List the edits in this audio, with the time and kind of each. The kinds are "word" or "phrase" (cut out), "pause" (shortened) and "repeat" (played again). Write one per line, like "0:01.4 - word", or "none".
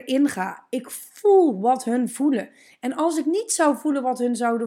none